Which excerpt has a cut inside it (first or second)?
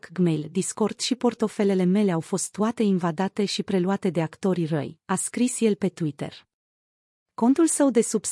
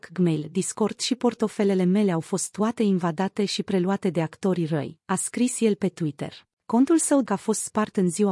second